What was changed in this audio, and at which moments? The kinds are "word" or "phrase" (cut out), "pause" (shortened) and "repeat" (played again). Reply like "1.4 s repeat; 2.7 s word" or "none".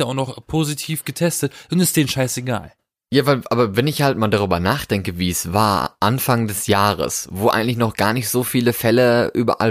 none